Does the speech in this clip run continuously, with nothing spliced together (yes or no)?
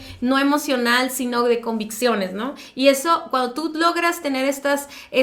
yes